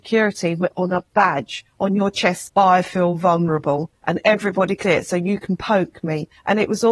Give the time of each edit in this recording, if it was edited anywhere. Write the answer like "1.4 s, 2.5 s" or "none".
2.5 s, 4.8 s

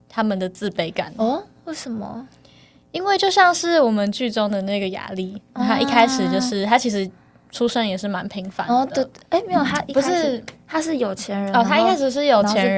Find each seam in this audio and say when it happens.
none

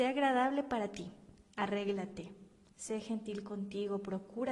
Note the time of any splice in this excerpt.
none

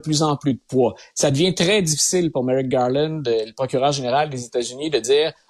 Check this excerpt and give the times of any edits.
none

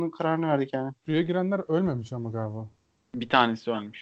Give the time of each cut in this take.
1.0 s

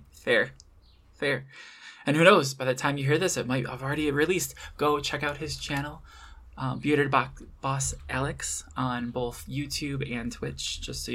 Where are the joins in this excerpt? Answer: none

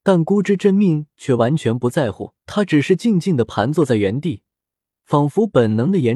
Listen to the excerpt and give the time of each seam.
2.4 s

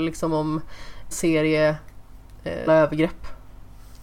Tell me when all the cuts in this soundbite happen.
1.1 s, 2.7 s

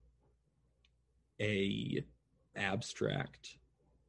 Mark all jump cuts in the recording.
2.5 s

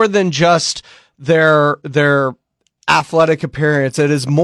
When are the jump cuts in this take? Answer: none

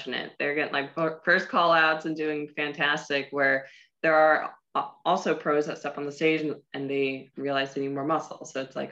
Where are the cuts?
none

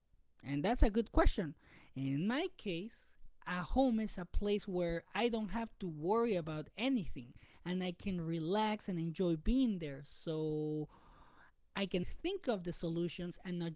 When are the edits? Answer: 12.0 s

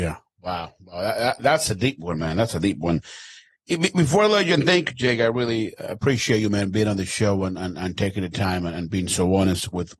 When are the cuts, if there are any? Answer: 3.6 s

